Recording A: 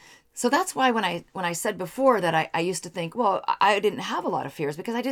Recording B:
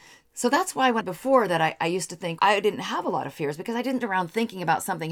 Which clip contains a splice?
B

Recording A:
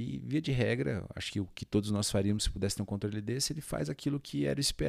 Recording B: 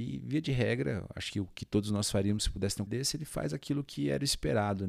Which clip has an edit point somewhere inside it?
B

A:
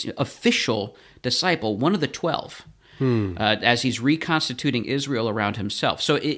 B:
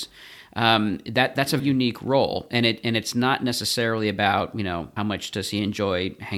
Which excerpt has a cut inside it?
B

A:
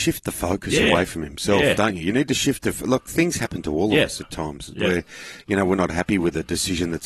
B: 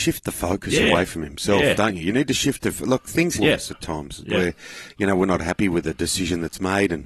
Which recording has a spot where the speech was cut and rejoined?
B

